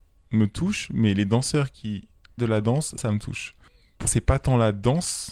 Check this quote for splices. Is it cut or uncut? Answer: cut